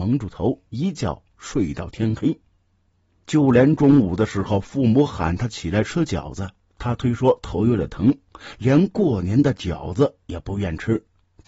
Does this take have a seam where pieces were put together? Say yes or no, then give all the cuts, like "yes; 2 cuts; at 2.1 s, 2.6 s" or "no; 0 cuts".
no; 0 cuts